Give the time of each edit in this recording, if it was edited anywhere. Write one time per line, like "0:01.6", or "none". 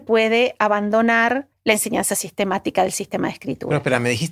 0:01.5